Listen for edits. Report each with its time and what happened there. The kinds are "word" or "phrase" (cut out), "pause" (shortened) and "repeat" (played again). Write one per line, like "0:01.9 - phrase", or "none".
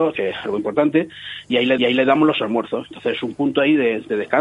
0:01.8 - repeat